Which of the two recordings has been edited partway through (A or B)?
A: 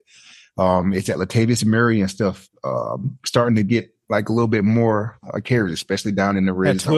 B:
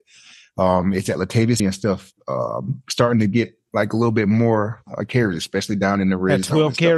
B